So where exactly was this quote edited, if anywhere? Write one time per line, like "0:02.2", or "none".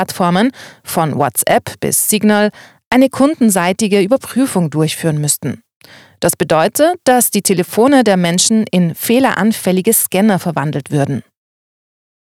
none